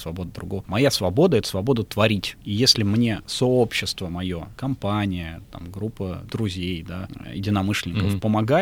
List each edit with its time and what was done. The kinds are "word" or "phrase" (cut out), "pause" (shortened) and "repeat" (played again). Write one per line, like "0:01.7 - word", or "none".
none

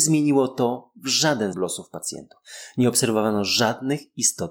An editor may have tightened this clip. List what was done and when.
0:01.5 - word

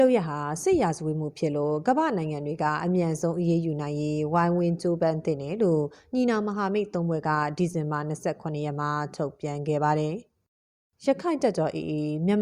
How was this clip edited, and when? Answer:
none

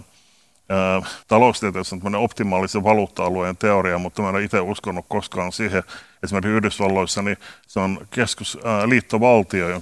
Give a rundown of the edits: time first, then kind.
0:01.2 - pause

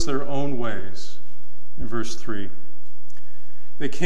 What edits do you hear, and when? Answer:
none

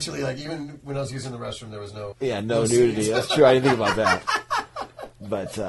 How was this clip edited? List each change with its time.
0:02.1 - word

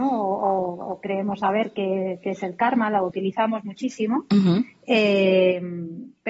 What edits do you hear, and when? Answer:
0:03.1 - word

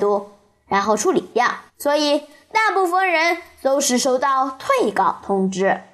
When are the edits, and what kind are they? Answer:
0:01.7 - pause

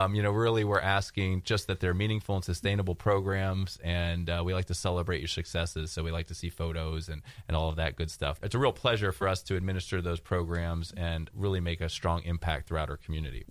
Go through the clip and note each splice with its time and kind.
none

